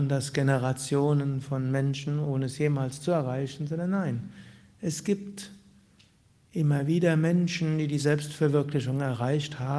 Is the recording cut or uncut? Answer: uncut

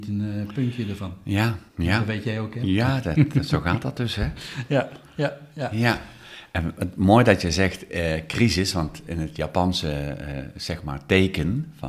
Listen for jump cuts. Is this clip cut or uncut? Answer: cut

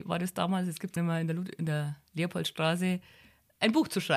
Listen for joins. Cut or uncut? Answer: cut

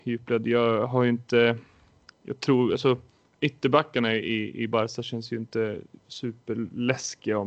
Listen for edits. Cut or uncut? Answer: cut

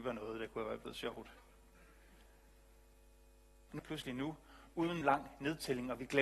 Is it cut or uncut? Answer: cut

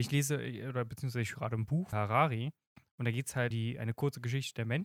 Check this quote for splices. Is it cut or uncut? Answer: cut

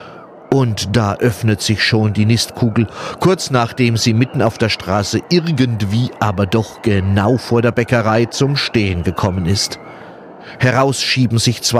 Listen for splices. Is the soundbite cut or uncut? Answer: uncut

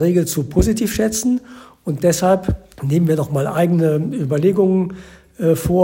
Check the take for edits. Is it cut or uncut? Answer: cut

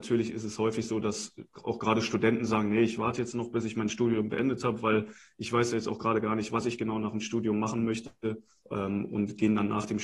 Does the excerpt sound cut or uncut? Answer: uncut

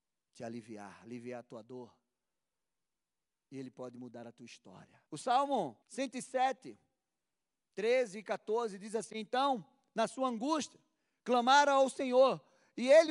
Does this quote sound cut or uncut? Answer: cut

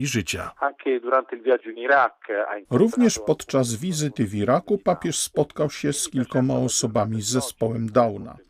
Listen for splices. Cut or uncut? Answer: uncut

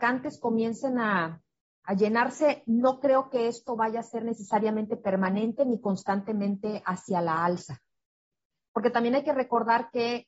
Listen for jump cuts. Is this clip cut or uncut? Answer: uncut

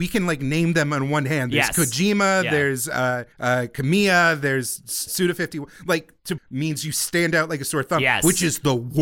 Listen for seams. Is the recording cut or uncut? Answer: cut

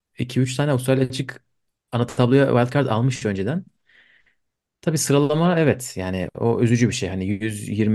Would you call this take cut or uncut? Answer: uncut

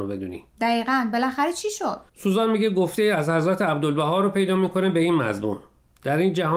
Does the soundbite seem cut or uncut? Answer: cut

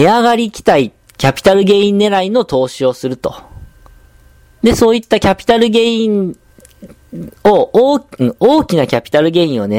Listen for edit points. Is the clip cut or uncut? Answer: uncut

